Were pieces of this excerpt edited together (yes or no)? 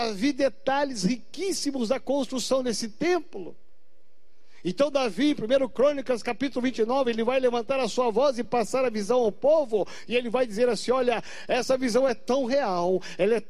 no